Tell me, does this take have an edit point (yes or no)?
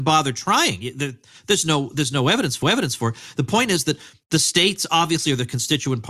yes